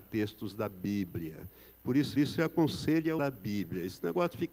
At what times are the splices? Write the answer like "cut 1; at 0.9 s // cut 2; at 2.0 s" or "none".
cut 1; at 2.2 s // cut 2; at 3.2 s